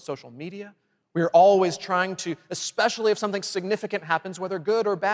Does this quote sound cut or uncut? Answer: uncut